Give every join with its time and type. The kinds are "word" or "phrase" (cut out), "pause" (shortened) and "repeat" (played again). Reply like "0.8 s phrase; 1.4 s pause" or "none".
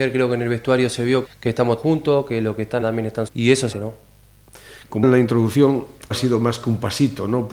1.3 s word; 1.8 s word; 2.8 s word; 3.3 s word; 3.7 s word; 5.0 s word; 6.1 s word